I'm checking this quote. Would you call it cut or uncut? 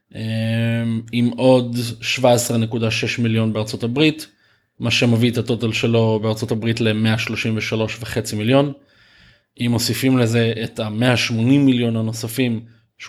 uncut